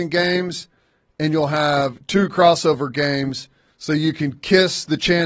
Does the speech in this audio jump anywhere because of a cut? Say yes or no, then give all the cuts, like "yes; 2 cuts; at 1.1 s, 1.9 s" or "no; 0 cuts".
no; 0 cuts